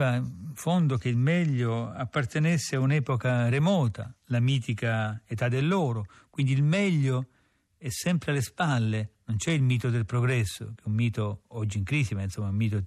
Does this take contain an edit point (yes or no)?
no